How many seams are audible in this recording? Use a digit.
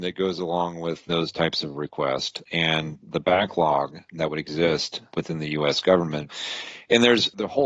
1